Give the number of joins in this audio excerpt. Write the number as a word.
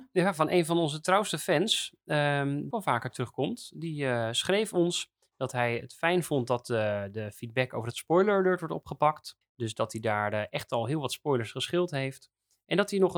two